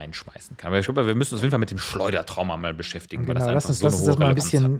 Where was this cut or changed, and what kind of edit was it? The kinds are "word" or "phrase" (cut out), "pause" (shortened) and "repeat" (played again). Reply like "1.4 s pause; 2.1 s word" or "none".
none